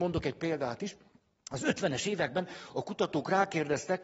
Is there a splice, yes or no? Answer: no